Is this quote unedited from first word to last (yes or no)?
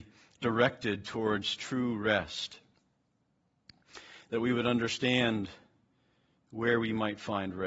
yes